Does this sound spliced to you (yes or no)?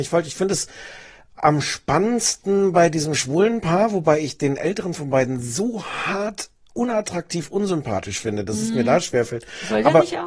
no